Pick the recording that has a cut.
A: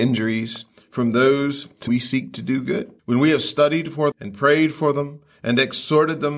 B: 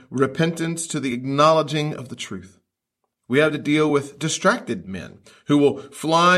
A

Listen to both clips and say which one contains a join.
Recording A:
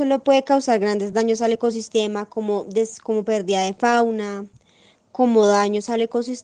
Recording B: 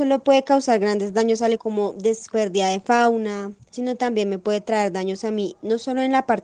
B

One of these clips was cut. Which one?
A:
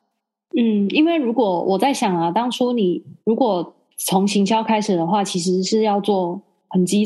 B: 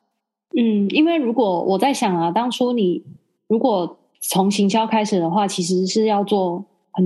A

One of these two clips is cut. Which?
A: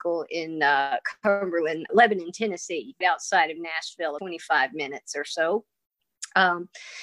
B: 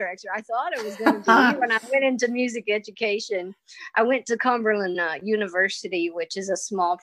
A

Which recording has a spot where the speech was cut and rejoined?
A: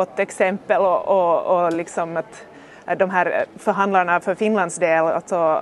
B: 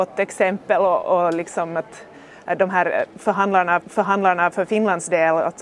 B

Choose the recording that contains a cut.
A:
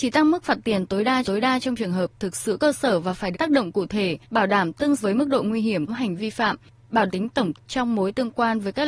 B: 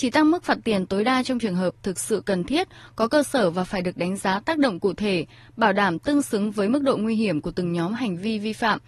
A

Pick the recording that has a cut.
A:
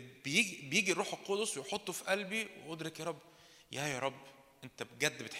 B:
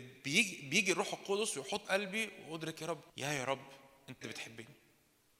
B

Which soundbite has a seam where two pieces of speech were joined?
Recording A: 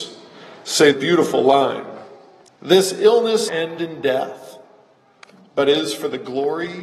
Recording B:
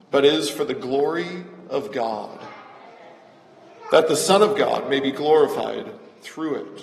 A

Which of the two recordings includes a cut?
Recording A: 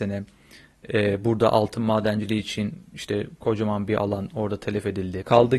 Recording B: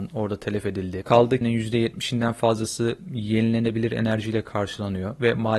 B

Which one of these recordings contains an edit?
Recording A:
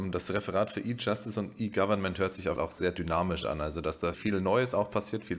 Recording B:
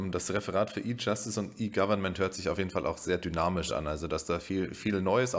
A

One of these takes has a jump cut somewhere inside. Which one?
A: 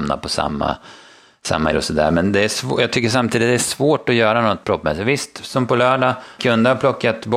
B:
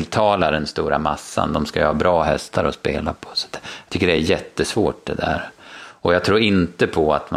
A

